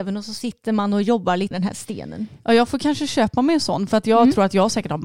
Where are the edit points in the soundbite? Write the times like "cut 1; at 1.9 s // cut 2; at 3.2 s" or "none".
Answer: cut 1; at 1.5 s